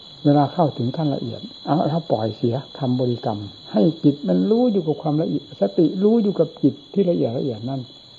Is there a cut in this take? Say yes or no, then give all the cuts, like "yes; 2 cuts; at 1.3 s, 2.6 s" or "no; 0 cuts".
yes; 2 cuts; at 2.7 s, 3.6 s